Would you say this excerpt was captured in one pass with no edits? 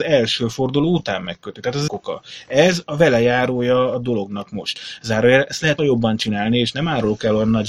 no; 2 cuts; at 1.9 s, 5.8 s

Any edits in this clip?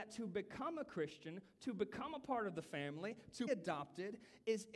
yes; 1 cut; at 3.5 s

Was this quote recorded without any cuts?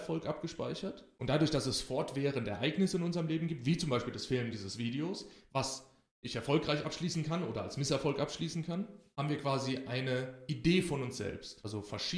yes; 0 cuts

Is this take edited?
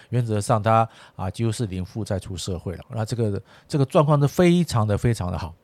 yes; 1 cut; at 2.8 s

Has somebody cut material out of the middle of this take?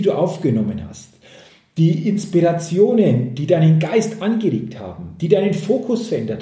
no; 0 cuts

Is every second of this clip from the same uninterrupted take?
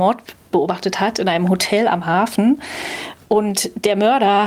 yes; 0 cuts

